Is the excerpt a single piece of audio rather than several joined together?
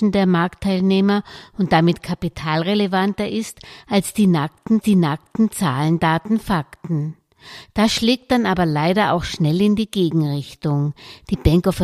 no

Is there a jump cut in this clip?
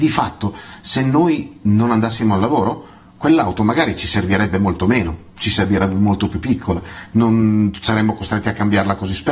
no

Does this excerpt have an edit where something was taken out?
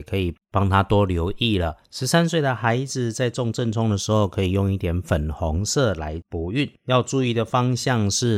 yes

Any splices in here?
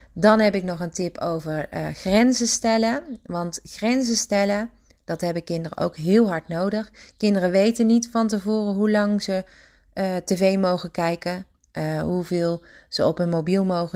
no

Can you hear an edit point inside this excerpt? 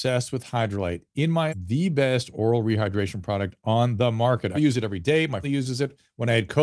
yes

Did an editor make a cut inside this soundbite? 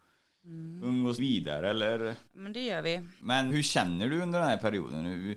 yes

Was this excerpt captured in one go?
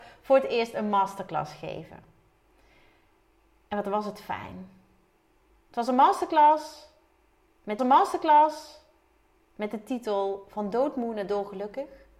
no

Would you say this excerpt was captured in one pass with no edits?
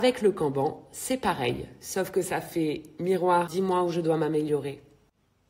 no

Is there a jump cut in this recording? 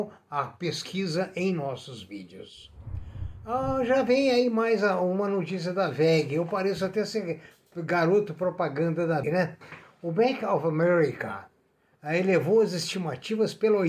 yes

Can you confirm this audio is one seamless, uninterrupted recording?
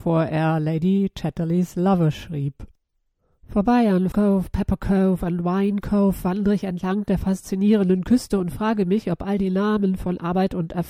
no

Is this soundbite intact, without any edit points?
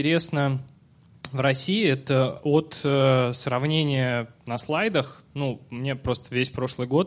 yes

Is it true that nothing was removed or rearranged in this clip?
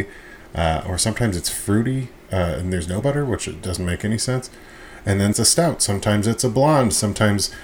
no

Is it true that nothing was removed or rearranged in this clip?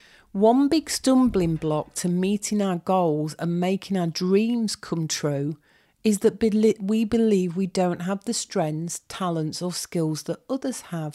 yes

